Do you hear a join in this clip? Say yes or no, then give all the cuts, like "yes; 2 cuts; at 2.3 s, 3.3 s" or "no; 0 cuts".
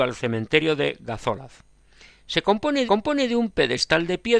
yes; 1 cut; at 2.9 s